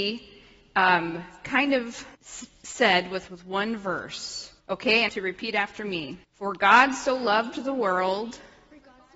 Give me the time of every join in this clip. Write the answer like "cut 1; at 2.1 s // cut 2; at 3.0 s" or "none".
cut 1; at 2.1 s // cut 2; at 3.3 s // cut 3; at 4.6 s // cut 4; at 5.1 s // cut 5; at 6.2 s